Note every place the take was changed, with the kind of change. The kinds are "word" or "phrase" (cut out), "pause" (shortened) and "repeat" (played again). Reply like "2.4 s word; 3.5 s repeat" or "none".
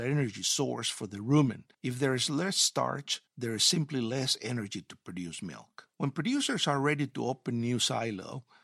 1.7 s pause; 3.3 s pause; 5.9 s pause